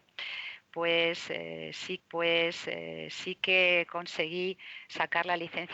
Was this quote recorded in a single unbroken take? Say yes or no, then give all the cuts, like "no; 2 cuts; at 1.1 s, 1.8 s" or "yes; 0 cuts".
no; 1 cut; at 2.0 s